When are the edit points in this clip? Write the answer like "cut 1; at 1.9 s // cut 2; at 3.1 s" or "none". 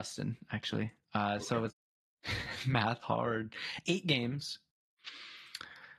cut 1; at 1.7 s // cut 2; at 3.0 s